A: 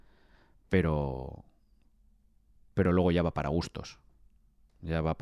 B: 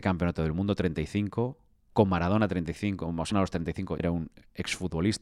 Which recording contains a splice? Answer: B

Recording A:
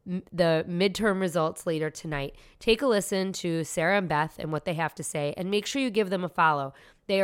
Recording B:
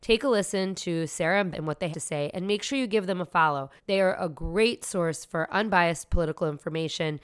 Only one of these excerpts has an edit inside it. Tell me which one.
B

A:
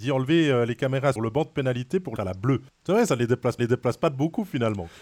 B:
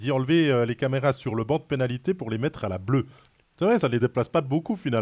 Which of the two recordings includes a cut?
A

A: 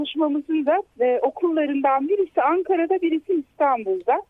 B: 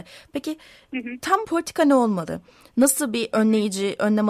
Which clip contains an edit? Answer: B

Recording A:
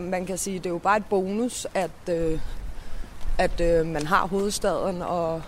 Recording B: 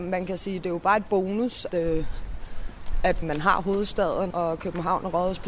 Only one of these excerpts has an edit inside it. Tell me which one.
B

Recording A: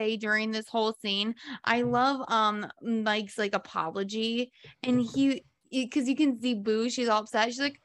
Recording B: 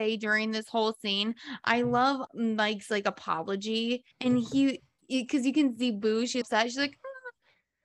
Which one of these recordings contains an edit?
B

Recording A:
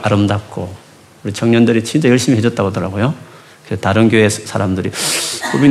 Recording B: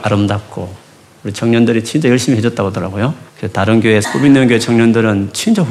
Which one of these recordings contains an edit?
B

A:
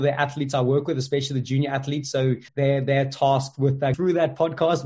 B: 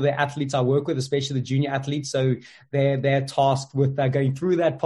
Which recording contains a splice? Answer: A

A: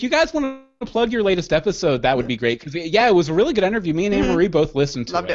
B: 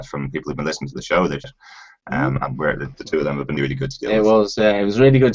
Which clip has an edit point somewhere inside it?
B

